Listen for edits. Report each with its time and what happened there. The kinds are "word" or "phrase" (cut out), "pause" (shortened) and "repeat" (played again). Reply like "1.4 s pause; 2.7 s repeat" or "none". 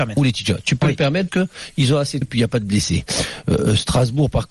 1.3 s word; 2.2 s word